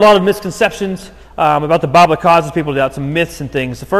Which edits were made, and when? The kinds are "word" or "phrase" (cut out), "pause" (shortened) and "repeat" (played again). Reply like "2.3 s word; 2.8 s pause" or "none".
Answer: 1.2 s pause